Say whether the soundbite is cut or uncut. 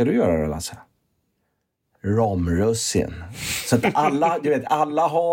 uncut